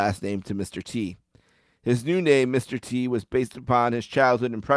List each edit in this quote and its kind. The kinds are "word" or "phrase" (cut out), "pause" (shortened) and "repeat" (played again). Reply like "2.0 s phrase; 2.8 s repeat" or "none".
none